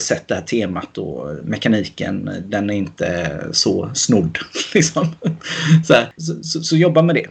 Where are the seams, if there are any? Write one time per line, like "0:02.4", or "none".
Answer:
0:06.2